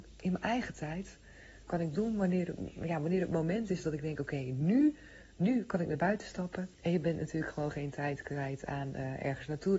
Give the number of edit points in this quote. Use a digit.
1